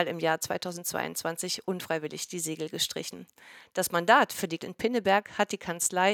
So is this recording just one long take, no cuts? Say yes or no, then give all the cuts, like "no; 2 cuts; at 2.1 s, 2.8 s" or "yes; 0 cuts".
no; 1 cut; at 4.6 s